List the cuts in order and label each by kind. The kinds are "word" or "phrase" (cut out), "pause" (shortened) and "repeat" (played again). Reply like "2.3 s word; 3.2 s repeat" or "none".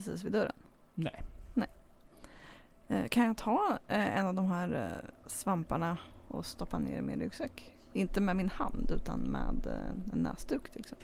5.2 s pause